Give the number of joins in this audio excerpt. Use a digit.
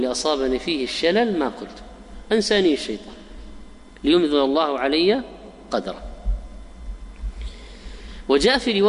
1